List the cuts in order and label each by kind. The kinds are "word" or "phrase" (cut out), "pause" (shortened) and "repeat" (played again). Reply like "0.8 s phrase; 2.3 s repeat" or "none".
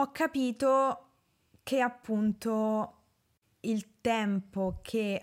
none

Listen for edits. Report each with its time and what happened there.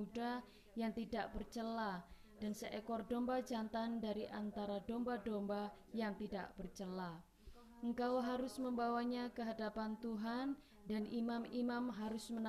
none

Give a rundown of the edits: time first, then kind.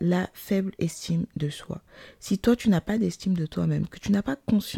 none

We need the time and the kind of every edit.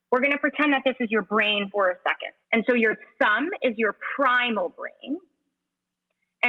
2.4 s pause

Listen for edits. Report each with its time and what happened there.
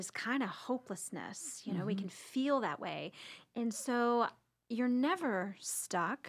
none

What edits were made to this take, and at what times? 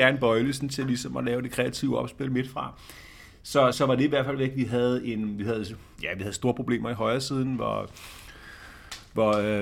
3.7 s word

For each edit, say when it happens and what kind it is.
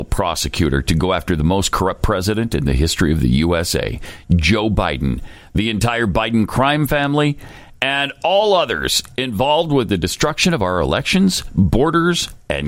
none

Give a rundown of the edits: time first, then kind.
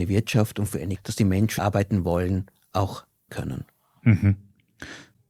1.0 s word; 1.6 s word; 3.3 s word

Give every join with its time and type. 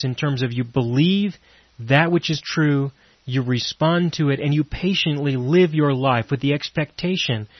none

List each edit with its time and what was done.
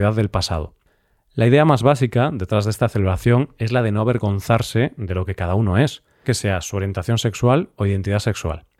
6.2 s word

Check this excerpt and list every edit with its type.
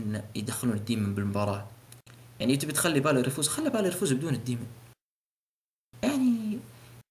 none

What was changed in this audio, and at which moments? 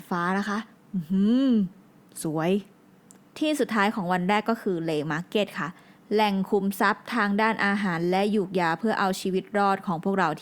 none

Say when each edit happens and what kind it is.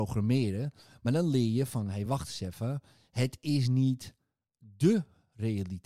none

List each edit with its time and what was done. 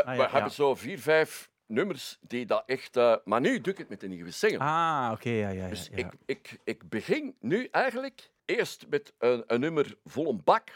8.4 s pause

